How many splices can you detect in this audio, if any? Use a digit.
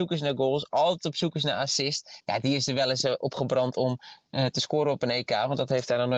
0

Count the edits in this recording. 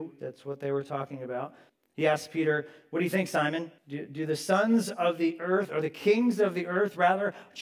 2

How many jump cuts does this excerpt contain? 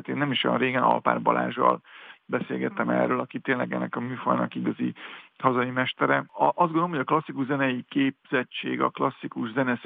1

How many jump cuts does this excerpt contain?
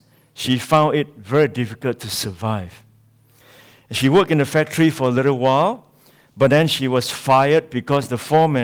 0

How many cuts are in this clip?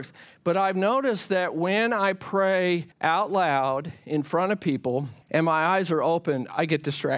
2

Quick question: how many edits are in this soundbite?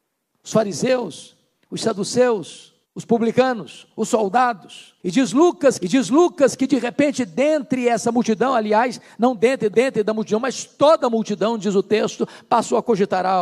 4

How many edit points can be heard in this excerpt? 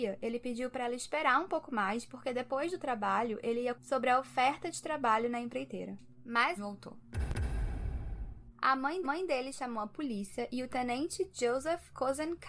3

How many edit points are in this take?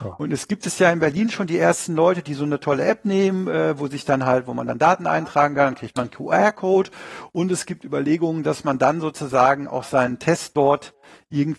0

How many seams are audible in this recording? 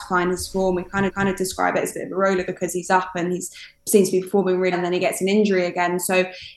3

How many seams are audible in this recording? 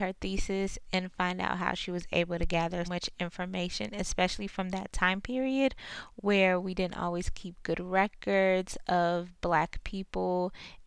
1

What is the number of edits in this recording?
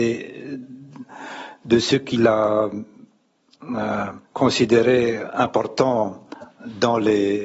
1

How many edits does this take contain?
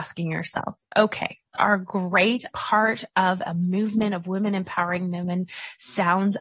2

